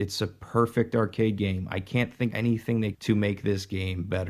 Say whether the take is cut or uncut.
cut